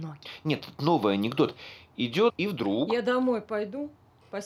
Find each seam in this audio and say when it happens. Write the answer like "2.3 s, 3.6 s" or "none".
2.3 s